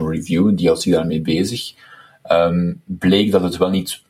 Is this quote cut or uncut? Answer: uncut